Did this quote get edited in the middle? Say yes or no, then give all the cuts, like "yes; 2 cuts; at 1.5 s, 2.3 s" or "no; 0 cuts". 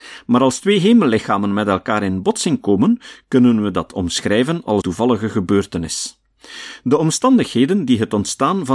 yes; 1 cut; at 4.8 s